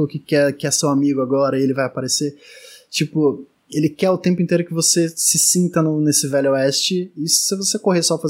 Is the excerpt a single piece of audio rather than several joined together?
yes; 0 cuts

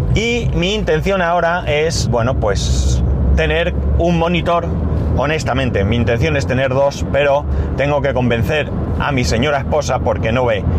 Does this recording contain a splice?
yes; 1 cut; at 2.1 s

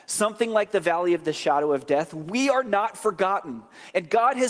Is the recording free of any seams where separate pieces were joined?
yes; 0 cuts

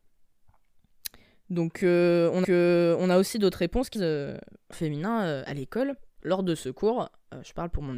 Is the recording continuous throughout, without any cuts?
no; 4 cuts; at 2.4 s, 3.9 s, 4.7 s, 6.2 s

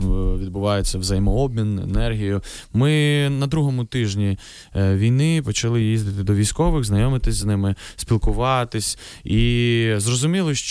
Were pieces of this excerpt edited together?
no; 0 cuts

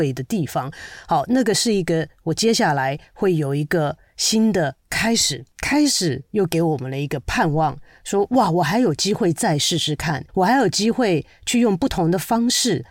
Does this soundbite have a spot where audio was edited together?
yes; 2 cuts; at 5.5 s, 10.3 s

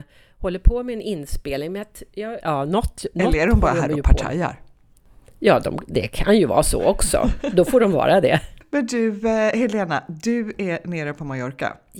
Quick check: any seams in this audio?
yes; 1 cut; at 2.4 s

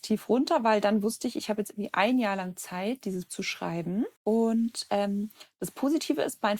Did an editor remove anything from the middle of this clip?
yes; 2 cuts; at 3.3 s, 4.2 s

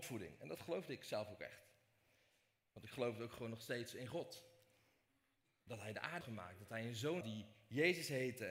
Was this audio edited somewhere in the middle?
yes; 2 cuts; at 6.2 s, 7.2 s

